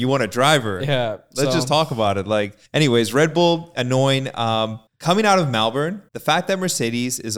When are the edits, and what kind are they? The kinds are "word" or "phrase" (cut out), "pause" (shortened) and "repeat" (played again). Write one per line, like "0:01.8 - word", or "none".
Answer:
0:02.7 - pause
0:04.9 - pause
0:06.1 - pause